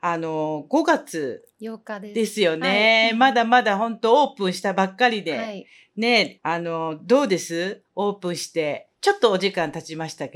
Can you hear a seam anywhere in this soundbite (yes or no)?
yes